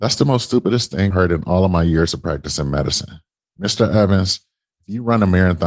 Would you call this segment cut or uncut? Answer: cut